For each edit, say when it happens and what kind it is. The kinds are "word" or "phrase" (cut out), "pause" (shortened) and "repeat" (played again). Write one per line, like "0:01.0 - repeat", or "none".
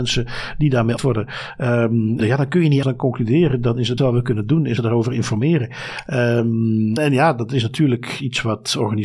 0:01.0 - word
0:02.2 - word
0:02.8 - word
0:04.0 - word
0:04.8 - word
0:07.0 - word